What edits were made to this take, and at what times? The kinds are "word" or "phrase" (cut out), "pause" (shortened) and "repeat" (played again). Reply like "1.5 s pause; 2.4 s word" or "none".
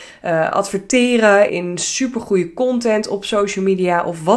1.5 s word